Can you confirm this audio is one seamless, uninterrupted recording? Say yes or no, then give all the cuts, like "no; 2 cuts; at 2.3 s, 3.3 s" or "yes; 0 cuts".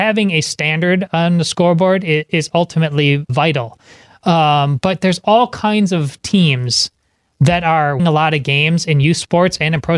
no; 2 cuts; at 3.3 s, 8.0 s